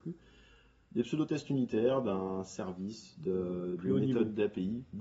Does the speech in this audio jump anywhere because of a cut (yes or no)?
no